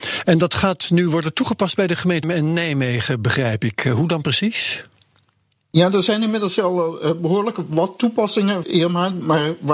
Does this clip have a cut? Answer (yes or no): yes